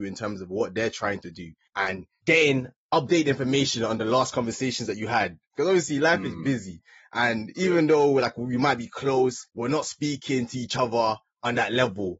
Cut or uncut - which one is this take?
cut